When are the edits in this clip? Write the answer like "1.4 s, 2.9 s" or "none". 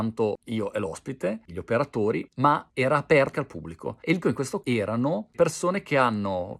1.5 s, 3.3 s, 4.2 s, 4.6 s, 5.3 s